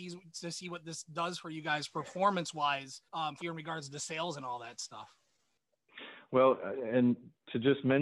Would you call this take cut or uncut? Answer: cut